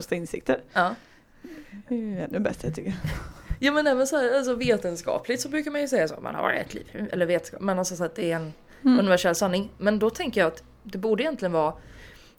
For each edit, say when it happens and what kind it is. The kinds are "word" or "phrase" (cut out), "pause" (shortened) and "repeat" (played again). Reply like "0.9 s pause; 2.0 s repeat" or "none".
none